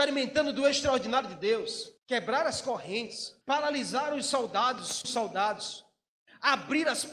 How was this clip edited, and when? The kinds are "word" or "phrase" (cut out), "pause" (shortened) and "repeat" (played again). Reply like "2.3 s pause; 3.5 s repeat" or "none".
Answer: 2.0 s pause; 3.4 s pause; 5.0 s word